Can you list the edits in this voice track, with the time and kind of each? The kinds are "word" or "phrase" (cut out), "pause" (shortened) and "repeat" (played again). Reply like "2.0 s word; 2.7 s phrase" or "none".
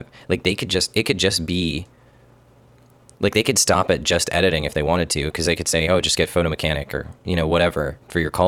none